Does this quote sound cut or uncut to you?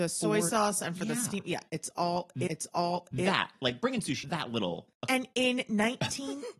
cut